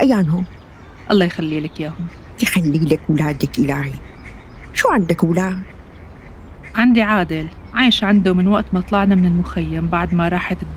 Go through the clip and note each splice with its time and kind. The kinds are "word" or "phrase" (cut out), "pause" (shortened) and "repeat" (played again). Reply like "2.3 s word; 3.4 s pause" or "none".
none